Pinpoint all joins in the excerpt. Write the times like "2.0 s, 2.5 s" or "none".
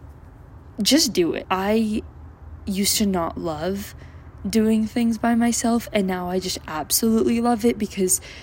none